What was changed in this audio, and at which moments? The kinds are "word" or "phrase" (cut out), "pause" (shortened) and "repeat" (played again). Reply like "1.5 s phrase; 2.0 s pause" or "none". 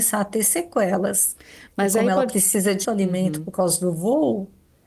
2.8 s word